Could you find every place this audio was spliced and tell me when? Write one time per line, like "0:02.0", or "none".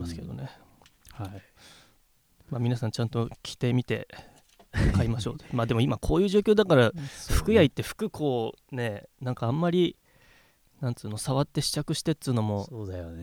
none